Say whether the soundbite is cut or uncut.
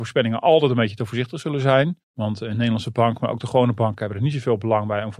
cut